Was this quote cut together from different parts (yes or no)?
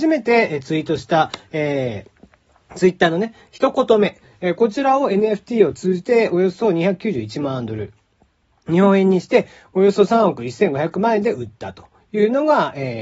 no